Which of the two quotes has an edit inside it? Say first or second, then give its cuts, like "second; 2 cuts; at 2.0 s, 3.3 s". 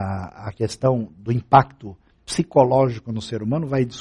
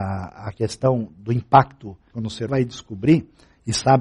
second; 2 cuts; at 2.1 s, 2.5 s